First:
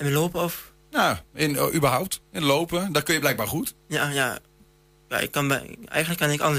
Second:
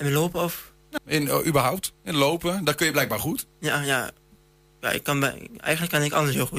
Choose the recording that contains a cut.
second; 1 cut; at 1.0 s

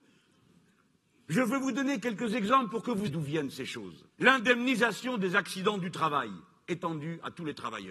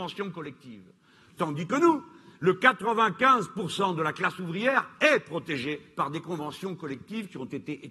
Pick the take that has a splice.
first; 2 cuts; at 3.1 s, 4.1 s

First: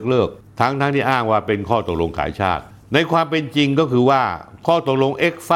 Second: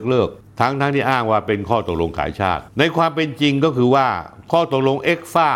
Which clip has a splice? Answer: second; 1 cut; at 2.7 s

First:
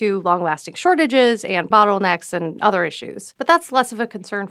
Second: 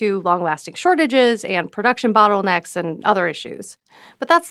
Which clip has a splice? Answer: first; 2 cuts; at 1.7 s, 3.4 s

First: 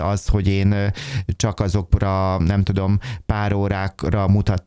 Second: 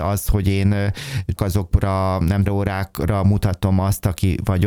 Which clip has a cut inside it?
second; 2 cuts; at 1.4 s, 2.5 s

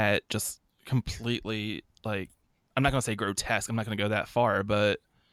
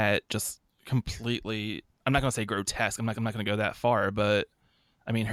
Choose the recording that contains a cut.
second; 2 cuts; at 1.9 s, 3.1 s

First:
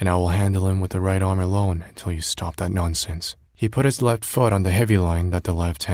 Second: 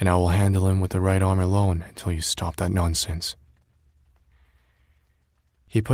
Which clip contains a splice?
first; 1 cut; at 3.5 s

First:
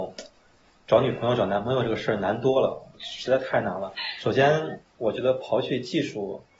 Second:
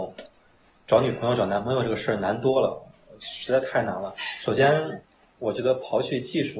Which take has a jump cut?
first; 2 cuts; at 2.9 s, 4.9 s

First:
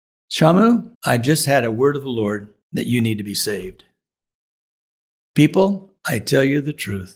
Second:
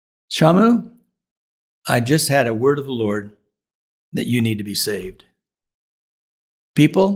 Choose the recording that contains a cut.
first; 3 cuts; at 0.9 s, 2.6 s, 6.0 s

